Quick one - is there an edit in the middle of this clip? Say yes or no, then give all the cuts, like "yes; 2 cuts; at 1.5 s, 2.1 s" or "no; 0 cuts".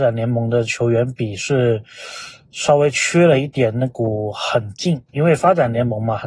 yes; 1 cut; at 5.1 s